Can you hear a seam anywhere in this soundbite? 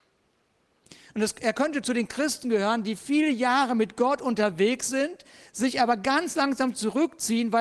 no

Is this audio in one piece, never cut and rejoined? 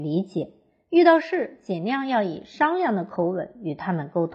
yes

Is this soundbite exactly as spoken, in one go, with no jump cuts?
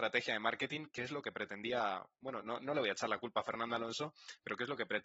yes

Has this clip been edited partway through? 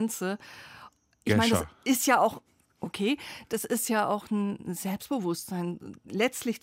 no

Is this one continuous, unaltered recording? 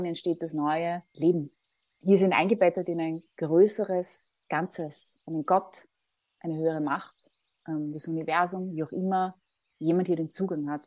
yes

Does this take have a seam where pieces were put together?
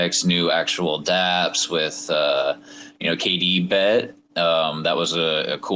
no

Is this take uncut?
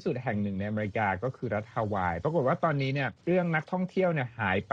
no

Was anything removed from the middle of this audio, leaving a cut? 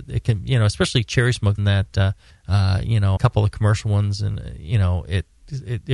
yes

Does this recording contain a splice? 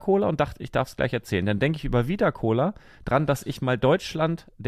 no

